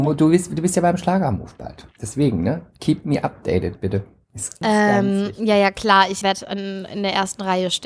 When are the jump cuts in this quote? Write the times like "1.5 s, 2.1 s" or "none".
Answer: 4.6 s, 6.2 s